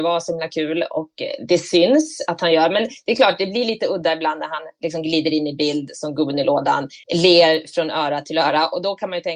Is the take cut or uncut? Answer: cut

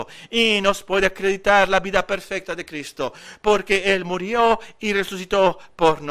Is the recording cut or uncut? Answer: uncut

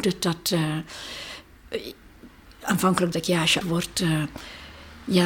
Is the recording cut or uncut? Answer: cut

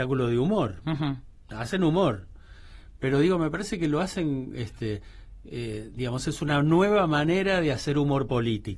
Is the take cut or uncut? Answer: uncut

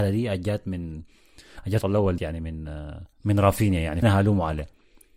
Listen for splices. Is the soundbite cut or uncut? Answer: cut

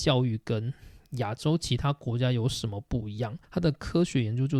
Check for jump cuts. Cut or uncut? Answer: cut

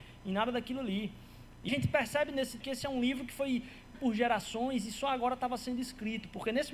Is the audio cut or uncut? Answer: cut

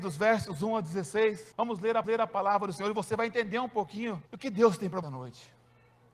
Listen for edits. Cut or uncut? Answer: cut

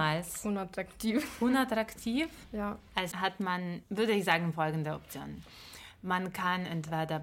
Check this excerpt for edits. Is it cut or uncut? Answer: cut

